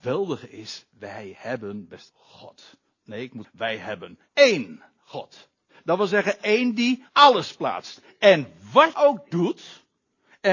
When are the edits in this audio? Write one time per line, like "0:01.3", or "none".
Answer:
0:02.1
0:03.4
0:04.3
0:05.7
0:07.1
0:08.9